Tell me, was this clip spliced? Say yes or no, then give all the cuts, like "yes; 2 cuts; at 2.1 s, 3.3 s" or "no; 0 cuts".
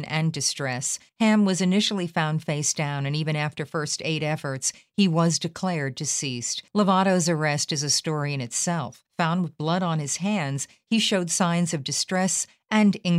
yes; 3 cuts; at 1.1 s, 6.7 s, 9.1 s